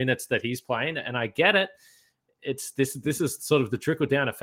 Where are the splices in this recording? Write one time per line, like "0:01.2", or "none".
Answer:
none